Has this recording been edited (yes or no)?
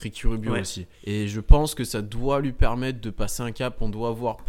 yes